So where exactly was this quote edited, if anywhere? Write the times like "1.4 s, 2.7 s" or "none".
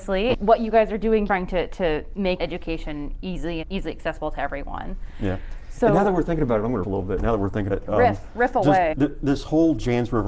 1.3 s, 2.4 s, 3.6 s, 6.8 s, 7.7 s, 8.9 s